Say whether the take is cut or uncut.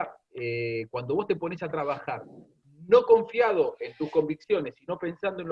uncut